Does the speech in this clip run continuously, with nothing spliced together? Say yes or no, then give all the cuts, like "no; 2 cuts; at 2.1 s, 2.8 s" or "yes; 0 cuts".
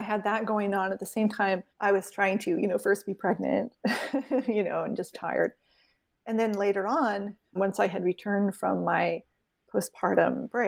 no; 3 cuts; at 1.7 s, 5.1 s, 7.6 s